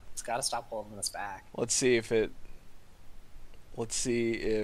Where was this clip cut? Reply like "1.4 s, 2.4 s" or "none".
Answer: none